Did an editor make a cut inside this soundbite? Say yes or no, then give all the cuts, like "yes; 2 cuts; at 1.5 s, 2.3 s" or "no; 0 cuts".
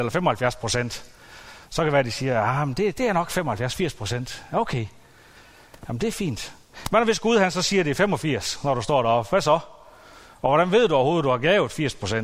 no; 0 cuts